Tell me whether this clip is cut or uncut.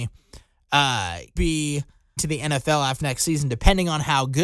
cut